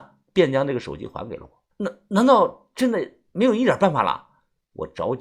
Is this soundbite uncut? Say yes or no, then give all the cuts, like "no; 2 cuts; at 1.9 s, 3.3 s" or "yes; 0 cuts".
no; 1 cut; at 1.7 s